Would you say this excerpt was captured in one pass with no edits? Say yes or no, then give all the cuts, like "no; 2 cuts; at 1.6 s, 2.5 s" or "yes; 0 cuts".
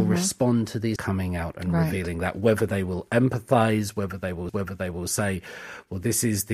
no; 2 cuts; at 1.0 s, 4.5 s